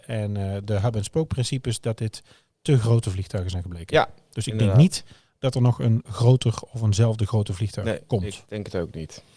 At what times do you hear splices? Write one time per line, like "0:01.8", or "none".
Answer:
none